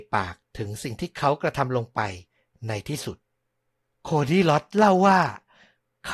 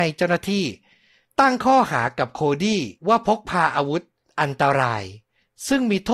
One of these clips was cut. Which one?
second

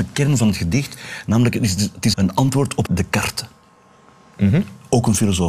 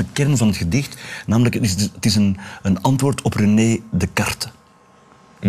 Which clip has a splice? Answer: first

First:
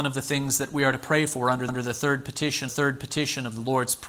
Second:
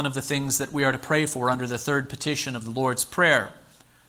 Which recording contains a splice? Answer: first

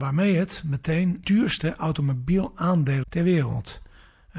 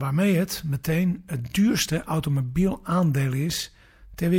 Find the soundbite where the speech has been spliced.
first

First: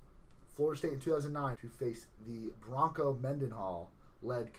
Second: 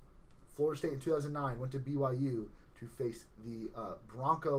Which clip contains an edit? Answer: first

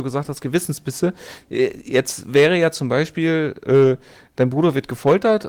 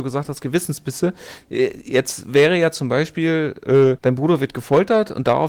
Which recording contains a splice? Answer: second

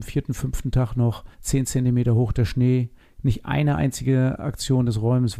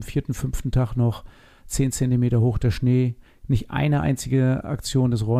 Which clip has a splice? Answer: first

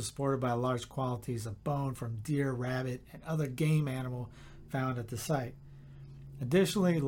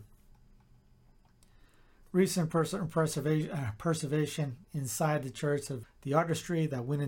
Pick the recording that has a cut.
second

